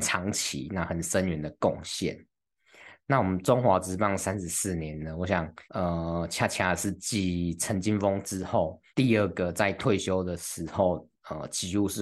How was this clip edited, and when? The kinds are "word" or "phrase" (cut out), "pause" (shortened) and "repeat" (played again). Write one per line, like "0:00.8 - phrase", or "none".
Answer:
0:05.6 - pause
0:08.9 - pause